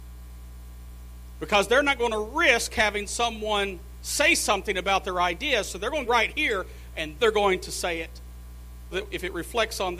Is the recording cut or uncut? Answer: cut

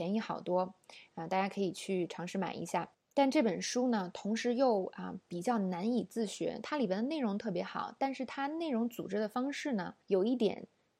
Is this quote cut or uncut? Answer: cut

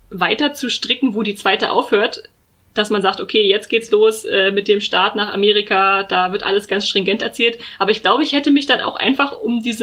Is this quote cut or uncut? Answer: uncut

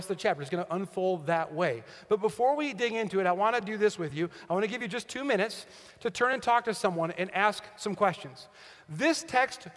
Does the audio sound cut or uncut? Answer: uncut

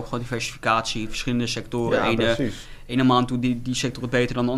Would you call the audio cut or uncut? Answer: uncut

